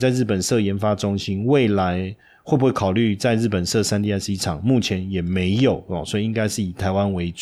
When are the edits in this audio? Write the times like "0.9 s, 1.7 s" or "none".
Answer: none